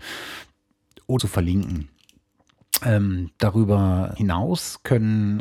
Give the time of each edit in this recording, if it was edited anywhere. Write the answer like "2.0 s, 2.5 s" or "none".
1.2 s, 4.2 s